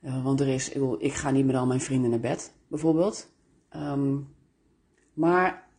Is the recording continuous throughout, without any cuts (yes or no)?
yes